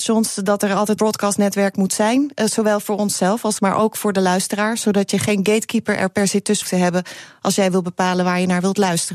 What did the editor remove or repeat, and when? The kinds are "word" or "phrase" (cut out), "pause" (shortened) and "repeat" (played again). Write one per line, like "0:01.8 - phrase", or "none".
0:01.0 - word
0:03.6 - word
0:06.6 - word